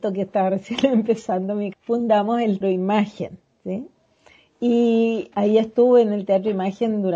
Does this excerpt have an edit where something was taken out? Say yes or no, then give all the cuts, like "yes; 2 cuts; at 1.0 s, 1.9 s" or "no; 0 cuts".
yes; 3 cuts; at 1.7 s, 2.6 s, 5.3 s